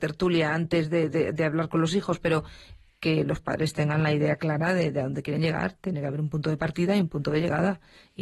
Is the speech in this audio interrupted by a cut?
no; 0 cuts

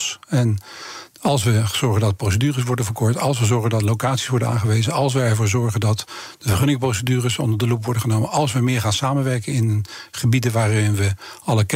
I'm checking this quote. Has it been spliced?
no; 0 cuts

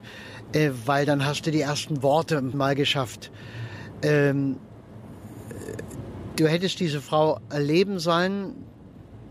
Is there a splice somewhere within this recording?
yes; 1 cut; at 2.5 s

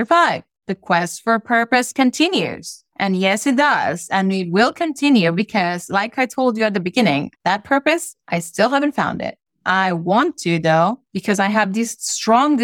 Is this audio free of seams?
yes; 0 cuts

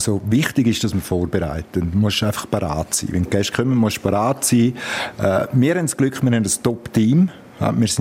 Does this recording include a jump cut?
no; 0 cuts

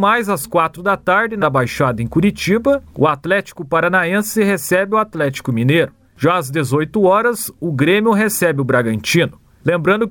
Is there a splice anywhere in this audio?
yes; 2 cuts; at 1.4 s, 2.9 s

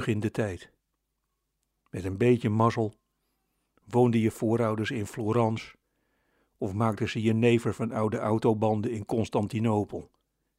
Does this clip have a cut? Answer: no; 0 cuts

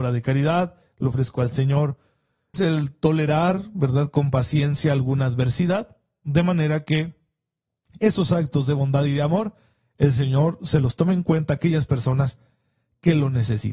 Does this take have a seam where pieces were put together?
yes; 1 cut; at 2.5 s

